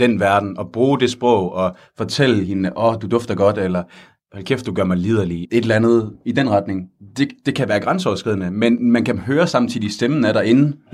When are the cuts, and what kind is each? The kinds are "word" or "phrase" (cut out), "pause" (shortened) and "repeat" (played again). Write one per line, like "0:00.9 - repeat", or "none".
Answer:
0:05.4 - word